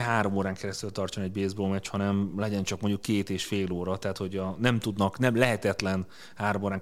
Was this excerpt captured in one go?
yes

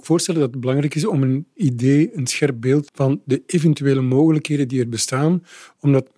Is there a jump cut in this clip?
yes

